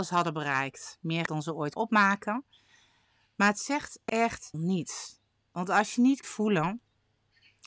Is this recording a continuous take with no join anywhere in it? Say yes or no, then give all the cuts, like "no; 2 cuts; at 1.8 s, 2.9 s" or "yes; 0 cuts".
no; 4 cuts; at 1.3 s, 1.8 s, 4.5 s, 6.2 s